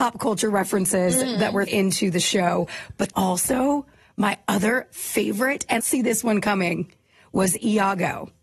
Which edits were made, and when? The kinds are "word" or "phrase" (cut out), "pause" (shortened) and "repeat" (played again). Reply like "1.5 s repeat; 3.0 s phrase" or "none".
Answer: 1.7 s word; 3.1 s word; 5.8 s phrase